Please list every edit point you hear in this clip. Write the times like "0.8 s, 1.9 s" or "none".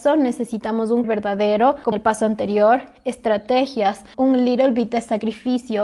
1.0 s, 1.9 s, 4.1 s